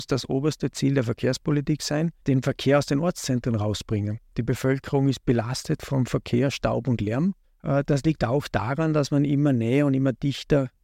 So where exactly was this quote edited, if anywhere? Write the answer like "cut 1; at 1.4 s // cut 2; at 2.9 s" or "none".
cut 1; at 2.2 s // cut 2; at 7.4 s